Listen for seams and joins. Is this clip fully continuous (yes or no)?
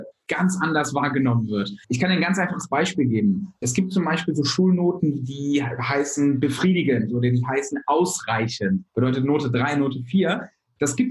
no